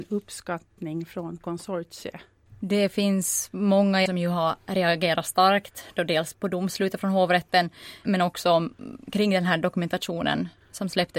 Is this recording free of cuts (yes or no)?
no